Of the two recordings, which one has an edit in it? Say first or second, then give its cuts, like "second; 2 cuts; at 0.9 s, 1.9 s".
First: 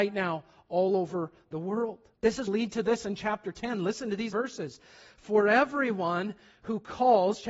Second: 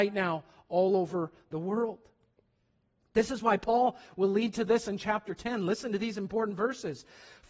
first; 3 cuts; at 2.1 s, 2.5 s, 4.3 s